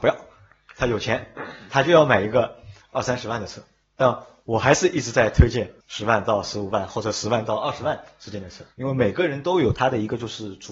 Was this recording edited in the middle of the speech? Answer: yes; 3 cuts; at 3.8 s, 5.8 s, 8.7 s

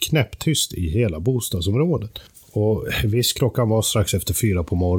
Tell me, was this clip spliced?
no; 0 cuts

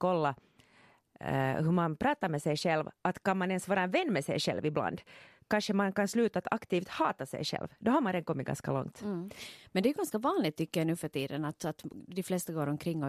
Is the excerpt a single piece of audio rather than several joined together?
yes; 0 cuts

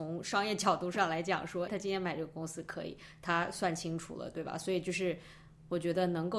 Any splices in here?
yes; 1 cut; at 1.7 s

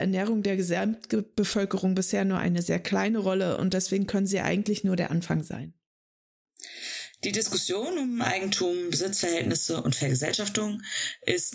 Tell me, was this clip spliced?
no; 0 cuts

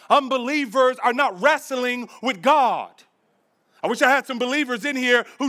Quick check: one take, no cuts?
yes; 0 cuts

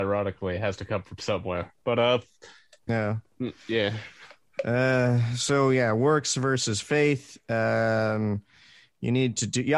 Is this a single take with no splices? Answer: no; 1 cut; at 2.9 s

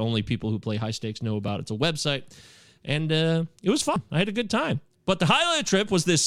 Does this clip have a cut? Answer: no; 0 cuts

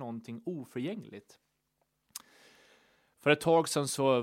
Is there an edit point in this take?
no; 0 cuts

